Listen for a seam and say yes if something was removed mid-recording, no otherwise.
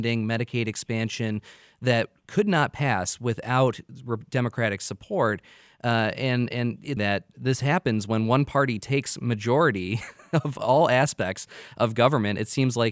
yes